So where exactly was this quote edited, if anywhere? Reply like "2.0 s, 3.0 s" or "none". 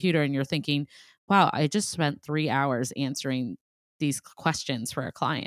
none